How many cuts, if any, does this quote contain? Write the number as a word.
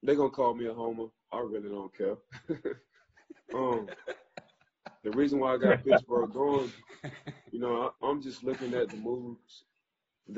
two